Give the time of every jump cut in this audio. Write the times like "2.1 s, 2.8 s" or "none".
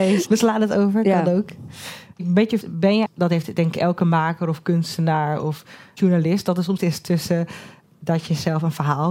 2.6 s, 3.1 s, 6.8 s